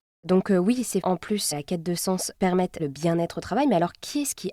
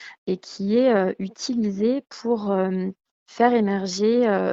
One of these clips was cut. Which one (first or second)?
first